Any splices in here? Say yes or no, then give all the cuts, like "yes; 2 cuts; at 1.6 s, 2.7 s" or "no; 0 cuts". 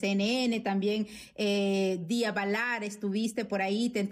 no; 0 cuts